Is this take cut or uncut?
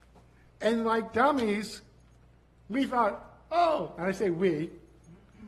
uncut